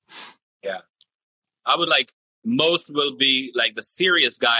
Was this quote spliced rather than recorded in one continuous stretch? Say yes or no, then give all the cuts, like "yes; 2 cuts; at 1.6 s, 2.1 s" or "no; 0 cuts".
yes; 1 cut; at 1.9 s